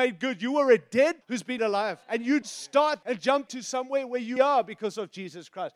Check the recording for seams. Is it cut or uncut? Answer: cut